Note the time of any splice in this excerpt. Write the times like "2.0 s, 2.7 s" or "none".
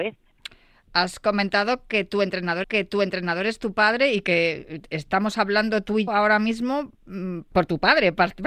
2.6 s, 6.1 s, 7.5 s